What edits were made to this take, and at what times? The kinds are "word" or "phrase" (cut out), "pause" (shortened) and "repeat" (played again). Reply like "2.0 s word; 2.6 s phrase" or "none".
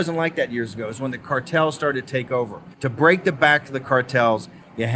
2.7 s pause